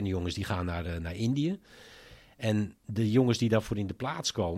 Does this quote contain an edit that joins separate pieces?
no; 0 cuts

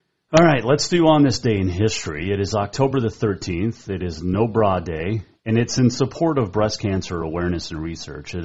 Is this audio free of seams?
yes; 0 cuts

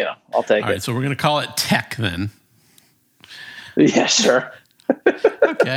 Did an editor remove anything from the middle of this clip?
no; 0 cuts

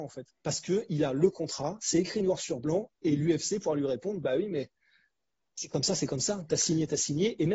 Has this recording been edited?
no; 0 cuts

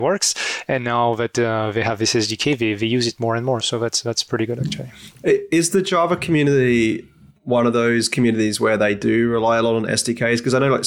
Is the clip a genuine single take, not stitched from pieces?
yes; 0 cuts

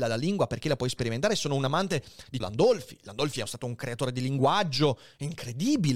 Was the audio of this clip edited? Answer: yes; 1 cut; at 2.4 s

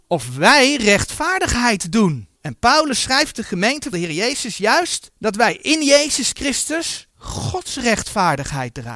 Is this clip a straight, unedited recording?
no; 4 cuts; at 2.4 s, 3.9 s, 5.1 s, 7.1 s

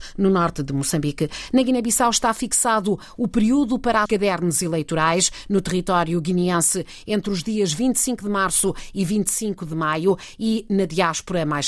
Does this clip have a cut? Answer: yes; 1 cut; at 4.1 s

